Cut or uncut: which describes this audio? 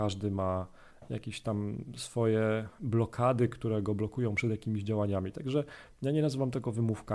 uncut